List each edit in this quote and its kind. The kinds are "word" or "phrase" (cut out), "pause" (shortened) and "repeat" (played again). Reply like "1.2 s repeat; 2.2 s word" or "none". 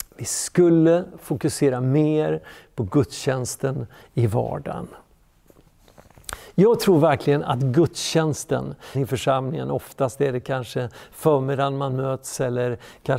8.9 s word